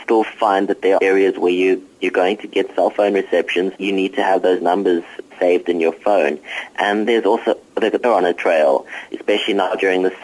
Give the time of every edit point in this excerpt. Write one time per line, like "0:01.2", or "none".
0:01.0
0:03.8
0:05.3
0:07.1
0:07.7
0:08.0